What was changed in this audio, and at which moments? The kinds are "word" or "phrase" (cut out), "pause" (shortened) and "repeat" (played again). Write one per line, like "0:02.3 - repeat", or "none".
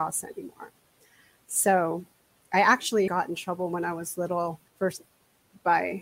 0:03.1 - word
0:04.7 - pause